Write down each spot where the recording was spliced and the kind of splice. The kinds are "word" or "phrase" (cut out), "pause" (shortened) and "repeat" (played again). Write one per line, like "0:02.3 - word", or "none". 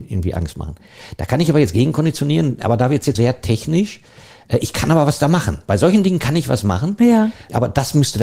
0:03.2 - word